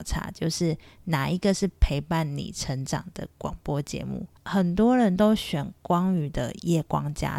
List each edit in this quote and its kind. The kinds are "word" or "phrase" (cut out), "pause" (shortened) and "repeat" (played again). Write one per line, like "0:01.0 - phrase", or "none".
0:04.4 - pause